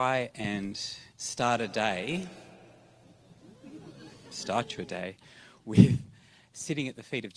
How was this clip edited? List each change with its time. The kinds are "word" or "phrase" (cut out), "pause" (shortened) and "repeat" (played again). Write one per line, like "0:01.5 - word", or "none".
0:01.1 - pause